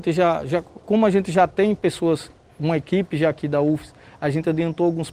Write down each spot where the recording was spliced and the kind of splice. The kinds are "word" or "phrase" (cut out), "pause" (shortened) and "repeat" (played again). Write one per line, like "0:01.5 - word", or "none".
none